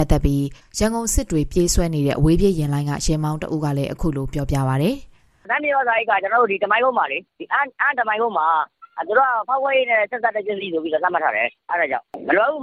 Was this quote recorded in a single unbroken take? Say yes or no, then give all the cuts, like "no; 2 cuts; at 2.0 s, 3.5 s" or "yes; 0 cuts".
no; 1 cut; at 7.3 s